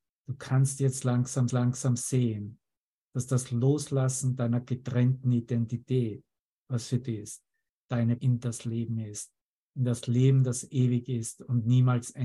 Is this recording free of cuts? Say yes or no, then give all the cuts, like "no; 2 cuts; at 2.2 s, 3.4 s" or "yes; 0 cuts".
no; 4 cuts; at 1.5 s, 7.0 s, 8.2 s, 9.5 s